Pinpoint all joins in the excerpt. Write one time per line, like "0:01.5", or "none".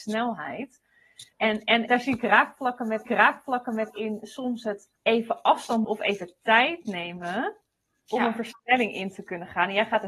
0:01.3
0:01.9
0:03.1
0:05.0
0:05.8